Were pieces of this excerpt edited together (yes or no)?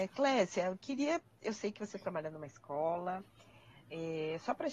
no